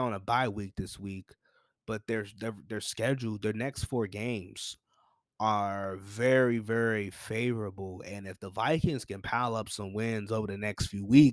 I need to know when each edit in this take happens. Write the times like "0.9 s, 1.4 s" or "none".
none